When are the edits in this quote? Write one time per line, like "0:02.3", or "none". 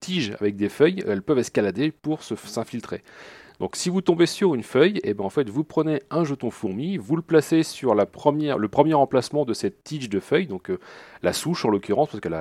none